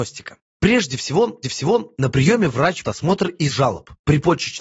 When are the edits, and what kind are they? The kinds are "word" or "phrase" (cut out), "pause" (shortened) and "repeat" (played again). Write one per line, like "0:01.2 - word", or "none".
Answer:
0:01.4 - repeat
0:02.8 - word
0:03.5 - word